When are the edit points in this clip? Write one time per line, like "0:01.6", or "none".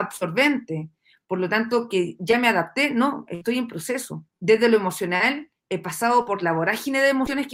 0:04.3